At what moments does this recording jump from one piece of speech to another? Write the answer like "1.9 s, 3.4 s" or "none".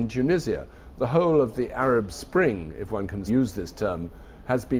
3.3 s